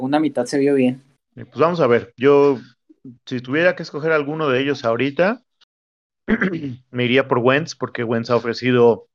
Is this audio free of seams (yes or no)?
yes